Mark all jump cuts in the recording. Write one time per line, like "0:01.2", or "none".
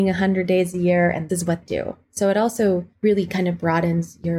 0:01.3
0:01.6
0:02.0
0:02.9

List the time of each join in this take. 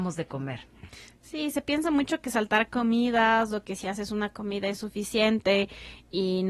none

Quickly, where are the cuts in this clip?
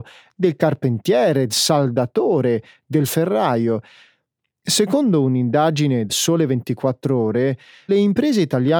0:01.5
0:03.1
0:06.1
0:07.9

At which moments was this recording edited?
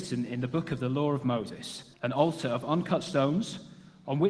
0:01.9

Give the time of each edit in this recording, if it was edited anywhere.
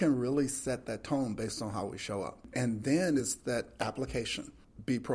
none

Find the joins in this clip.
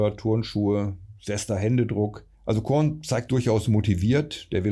0:02.3
0:03.3

